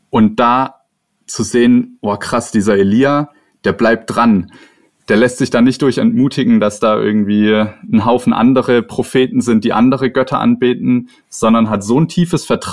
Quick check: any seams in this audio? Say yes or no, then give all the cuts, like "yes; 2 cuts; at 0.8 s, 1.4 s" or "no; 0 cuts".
no; 0 cuts